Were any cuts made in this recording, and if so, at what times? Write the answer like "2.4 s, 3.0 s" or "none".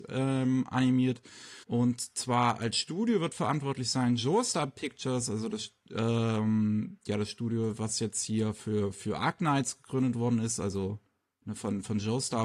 1.6 s